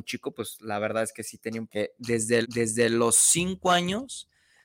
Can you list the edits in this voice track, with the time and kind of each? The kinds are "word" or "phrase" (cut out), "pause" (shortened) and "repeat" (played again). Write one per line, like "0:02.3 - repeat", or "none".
0:01.7 - word
0:02.4 - repeat